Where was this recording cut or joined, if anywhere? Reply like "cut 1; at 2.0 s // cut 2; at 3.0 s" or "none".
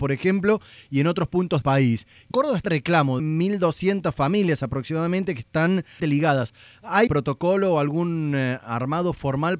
cut 1; at 1.6 s // cut 2; at 2.3 s // cut 3; at 2.6 s // cut 4; at 3.2 s // cut 5; at 6.0 s // cut 6; at 7.1 s